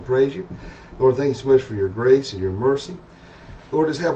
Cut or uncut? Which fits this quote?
uncut